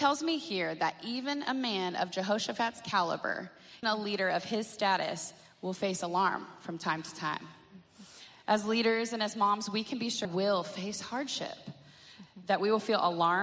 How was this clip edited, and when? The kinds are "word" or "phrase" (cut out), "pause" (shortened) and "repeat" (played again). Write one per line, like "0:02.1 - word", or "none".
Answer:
0:03.8 - word
0:10.2 - phrase